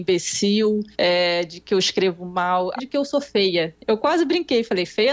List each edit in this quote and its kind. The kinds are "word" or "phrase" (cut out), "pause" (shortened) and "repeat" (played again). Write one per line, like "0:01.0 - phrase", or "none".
0:00.9 - pause
0:02.8 - word